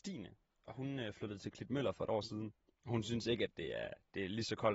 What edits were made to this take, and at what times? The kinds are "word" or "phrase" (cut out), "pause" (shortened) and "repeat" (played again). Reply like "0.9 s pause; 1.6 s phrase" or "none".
2.7 s pause